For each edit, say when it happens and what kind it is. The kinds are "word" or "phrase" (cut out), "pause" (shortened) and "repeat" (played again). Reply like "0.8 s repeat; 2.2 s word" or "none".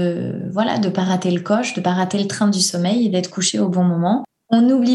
none